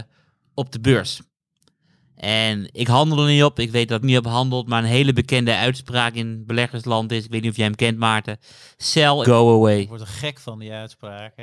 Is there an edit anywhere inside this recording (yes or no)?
yes